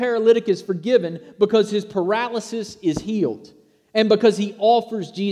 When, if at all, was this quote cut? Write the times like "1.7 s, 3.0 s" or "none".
none